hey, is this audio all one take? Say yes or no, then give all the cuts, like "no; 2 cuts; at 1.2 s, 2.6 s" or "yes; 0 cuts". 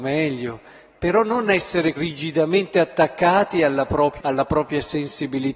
no; 2 cuts; at 2.0 s, 4.2 s